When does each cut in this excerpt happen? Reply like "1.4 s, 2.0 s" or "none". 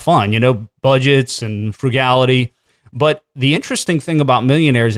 none